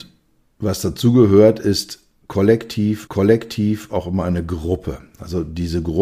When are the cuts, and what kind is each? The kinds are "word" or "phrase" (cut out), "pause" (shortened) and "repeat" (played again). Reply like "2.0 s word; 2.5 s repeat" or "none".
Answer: 3.1 s repeat